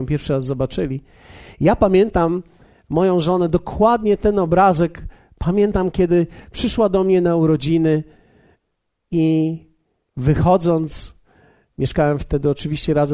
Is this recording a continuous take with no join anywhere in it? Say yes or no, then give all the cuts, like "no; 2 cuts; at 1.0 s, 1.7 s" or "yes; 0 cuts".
yes; 0 cuts